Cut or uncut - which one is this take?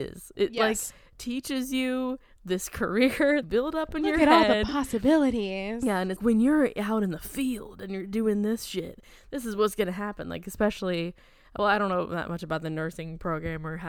cut